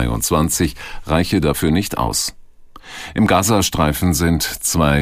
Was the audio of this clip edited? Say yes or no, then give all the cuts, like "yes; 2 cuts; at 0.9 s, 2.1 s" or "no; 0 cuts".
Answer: no; 0 cuts